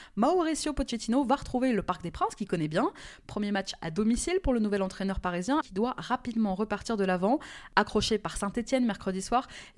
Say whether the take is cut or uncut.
cut